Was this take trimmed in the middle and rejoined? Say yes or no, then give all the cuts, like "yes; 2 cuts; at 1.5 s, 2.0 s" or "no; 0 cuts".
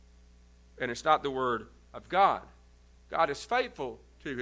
no; 0 cuts